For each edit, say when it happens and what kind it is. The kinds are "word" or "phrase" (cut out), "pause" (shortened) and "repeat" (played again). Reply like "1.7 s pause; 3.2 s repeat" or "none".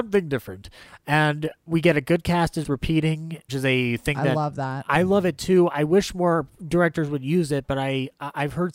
2.6 s word; 3.5 s phrase